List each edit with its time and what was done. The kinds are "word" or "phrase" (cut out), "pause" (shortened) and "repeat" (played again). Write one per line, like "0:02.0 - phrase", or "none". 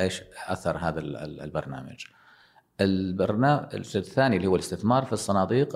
none